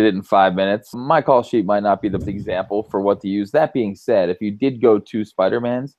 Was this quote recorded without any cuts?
no; 2 cuts; at 0.9 s, 2.2 s

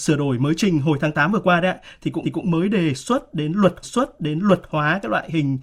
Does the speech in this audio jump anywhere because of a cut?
yes; 2 cuts; at 2.2 s, 3.8 s

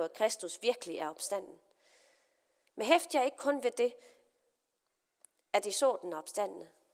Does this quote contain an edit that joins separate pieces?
no; 0 cuts

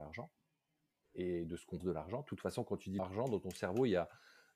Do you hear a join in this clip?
yes; 2 cuts; at 1.8 s, 3.0 s

